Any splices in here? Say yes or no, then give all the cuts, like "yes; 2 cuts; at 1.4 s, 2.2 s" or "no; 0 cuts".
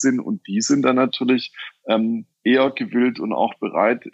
yes; 1 cut; at 2.3 s